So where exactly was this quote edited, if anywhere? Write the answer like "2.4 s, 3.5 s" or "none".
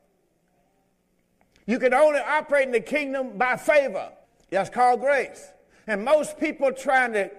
4.2 s, 5.7 s